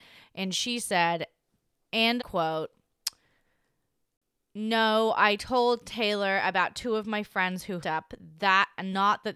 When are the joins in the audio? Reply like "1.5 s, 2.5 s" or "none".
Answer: 2.2 s, 7.8 s